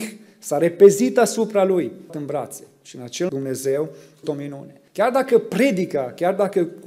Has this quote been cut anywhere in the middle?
yes; 4 cuts; at 2.1 s, 3.3 s, 4.2 s, 4.9 s

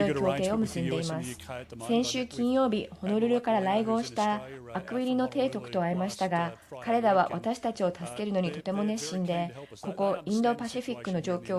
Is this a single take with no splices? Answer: yes; 0 cuts

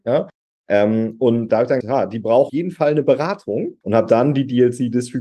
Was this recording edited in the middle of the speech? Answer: yes; 4 cuts; at 1.5 s, 1.8 s, 2.5 s, 3.8 s

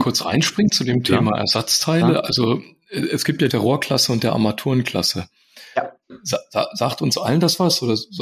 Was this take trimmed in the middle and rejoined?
yes; 1 cut; at 3.5 s

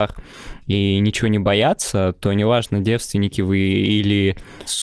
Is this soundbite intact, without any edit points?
yes; 0 cuts

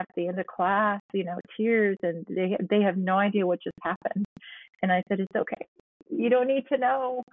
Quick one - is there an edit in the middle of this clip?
no; 0 cuts

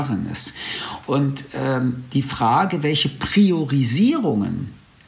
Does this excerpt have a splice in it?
no; 0 cuts

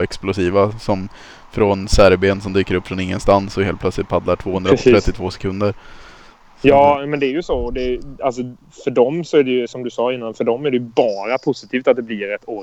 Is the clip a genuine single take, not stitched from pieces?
yes; 0 cuts

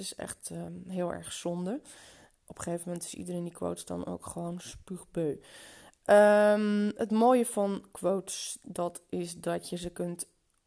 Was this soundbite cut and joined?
no; 0 cuts

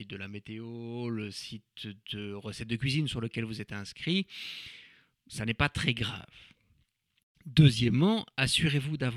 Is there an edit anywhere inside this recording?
no; 0 cuts

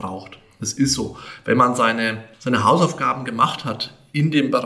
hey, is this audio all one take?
no; 1 cut; at 2.3 s

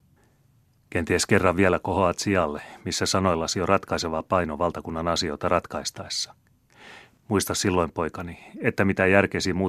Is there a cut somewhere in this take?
no; 0 cuts

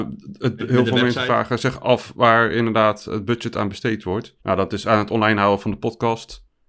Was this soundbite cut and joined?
yes; 1 cut; at 4.4 s

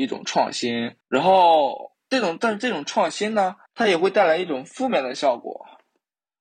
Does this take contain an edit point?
yes; 2 cuts; at 1.0 s, 3.7 s

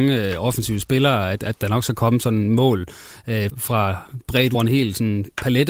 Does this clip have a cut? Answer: yes; 2 cuts; at 3.5 s, 4.5 s

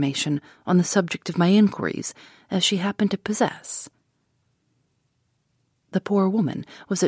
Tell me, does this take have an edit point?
no; 0 cuts

